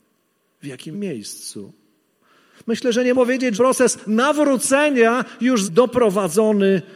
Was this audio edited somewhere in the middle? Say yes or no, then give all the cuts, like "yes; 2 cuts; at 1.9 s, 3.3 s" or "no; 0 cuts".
yes; 4 cuts; at 0.9 s, 3.1 s, 3.5 s, 5.6 s